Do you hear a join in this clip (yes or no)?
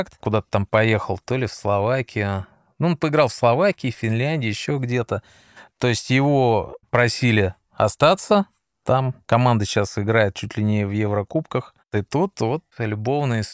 no